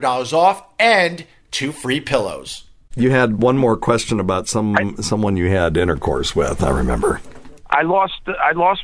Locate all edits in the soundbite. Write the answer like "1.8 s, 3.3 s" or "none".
none